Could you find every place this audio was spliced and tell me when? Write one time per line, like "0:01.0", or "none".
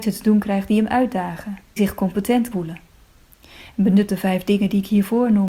0:01.8
0:02.5
0:04.1